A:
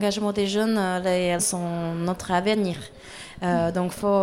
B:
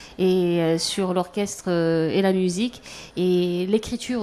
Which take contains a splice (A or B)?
A